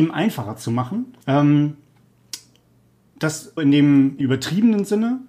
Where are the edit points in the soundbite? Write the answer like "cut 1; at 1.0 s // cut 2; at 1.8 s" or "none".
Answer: cut 1; at 1.2 s // cut 2; at 3.6 s // cut 3; at 4.2 s